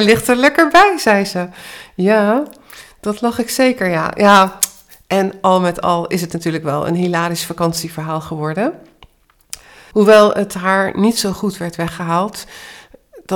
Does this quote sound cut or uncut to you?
uncut